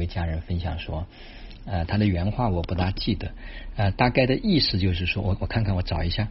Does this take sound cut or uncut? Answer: uncut